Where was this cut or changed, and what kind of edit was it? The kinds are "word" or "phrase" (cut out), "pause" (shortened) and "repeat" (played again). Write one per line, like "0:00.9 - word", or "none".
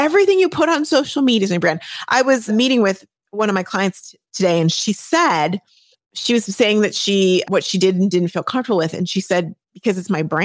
0:02.5 - word
0:05.9 - pause
0:07.4 - word